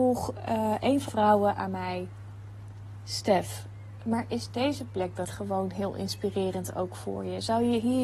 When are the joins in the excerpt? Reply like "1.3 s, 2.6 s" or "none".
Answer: 1.1 s, 5.2 s